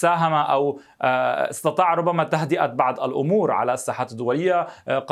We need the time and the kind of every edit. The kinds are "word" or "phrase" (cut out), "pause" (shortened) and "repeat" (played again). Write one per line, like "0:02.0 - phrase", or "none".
none